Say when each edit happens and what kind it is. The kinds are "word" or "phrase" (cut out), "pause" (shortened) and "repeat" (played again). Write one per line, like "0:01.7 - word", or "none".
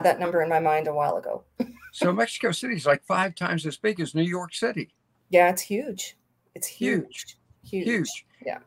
none